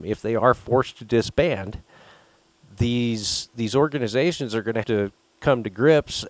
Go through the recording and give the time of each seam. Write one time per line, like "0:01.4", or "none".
0:04.8